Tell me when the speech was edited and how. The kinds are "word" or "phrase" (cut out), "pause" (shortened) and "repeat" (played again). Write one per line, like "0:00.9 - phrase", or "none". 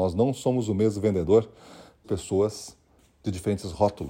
0:02.0 - phrase